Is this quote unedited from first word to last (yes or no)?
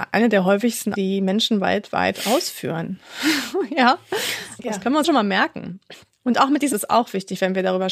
no